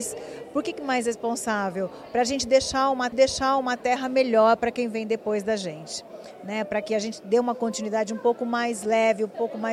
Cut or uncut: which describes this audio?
cut